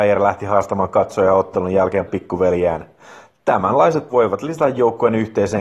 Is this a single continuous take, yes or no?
no